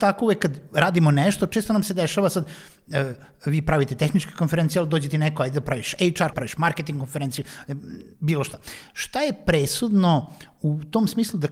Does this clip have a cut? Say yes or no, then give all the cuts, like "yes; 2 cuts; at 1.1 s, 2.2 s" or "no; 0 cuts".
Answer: yes; 2 cuts; at 6.3 s, 8.1 s